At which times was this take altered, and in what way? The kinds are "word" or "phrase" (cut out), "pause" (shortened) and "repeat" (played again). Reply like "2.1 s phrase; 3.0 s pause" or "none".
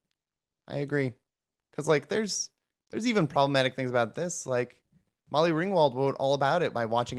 none

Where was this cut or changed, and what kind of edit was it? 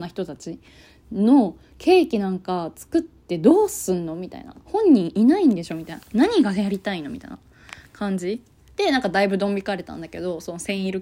none

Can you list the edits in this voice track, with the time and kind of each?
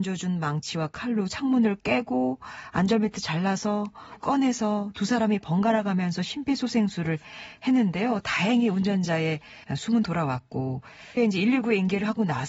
4.2 s word; 9.6 s pause; 11.2 s word

